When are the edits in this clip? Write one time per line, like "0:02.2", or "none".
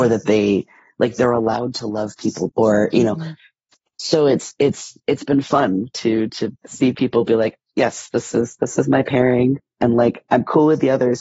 0:02.5